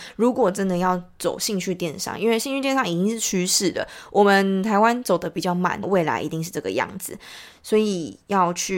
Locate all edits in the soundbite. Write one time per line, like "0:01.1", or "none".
0:05.8